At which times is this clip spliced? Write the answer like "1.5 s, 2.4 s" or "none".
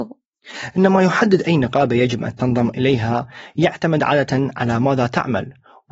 none